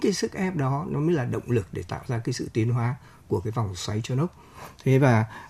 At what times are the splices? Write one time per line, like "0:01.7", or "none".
none

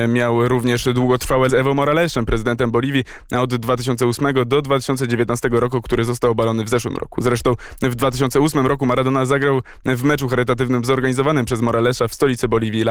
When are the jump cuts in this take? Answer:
0:01.5

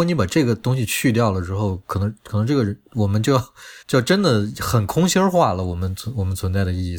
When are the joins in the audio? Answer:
0:03.8

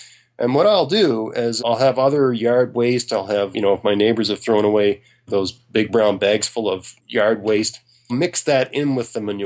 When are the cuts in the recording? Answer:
0:01.6
0:03.5
0:05.3
0:07.0
0:08.1

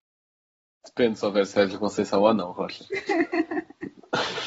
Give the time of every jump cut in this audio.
none

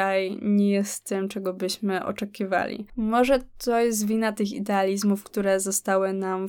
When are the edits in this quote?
none

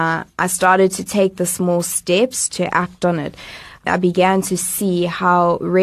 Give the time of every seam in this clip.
none

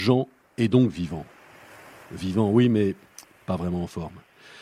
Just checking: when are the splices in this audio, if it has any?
none

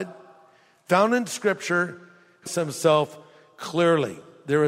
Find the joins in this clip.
0:02.5

